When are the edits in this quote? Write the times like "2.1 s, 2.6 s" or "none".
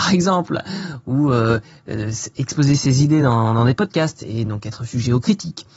none